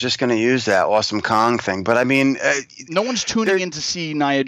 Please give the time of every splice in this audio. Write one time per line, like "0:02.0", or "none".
none